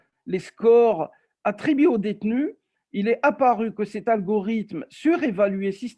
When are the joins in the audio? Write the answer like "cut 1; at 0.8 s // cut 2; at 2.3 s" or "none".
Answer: none